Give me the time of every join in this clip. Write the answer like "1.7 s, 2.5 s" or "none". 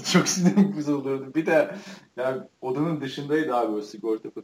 2.5 s